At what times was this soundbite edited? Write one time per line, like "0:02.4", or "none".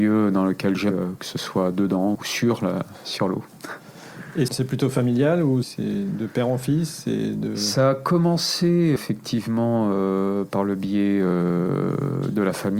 0:00.9
0:02.1
0:04.5
0:05.6
0:09.0